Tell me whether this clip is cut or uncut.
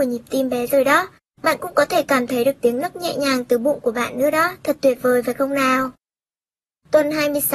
uncut